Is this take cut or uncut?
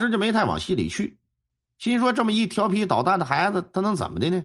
uncut